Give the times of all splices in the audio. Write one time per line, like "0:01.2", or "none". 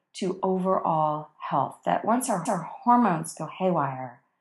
0:02.5